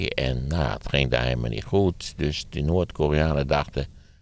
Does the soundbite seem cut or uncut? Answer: uncut